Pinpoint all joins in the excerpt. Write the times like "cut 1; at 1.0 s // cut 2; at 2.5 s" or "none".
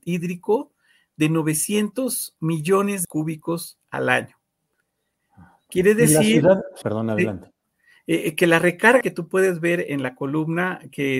cut 1; at 3.0 s // cut 2; at 6.8 s // cut 3; at 9.0 s